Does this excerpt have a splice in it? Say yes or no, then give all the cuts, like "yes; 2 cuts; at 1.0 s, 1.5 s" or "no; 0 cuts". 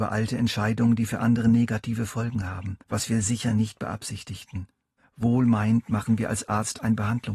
yes; 2 cuts; at 2.8 s, 5.0 s